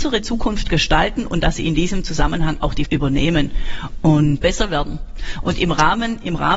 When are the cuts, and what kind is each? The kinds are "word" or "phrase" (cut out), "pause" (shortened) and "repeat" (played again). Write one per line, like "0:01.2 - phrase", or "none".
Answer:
0:02.9 - word
0:04.4 - phrase